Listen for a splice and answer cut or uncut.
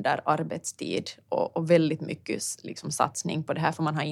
uncut